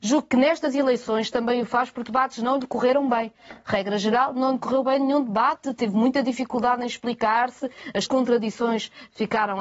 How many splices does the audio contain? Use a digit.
2